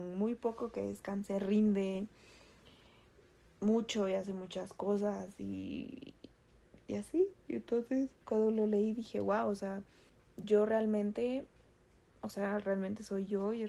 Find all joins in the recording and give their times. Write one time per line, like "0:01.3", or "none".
0:08.2
0:10.1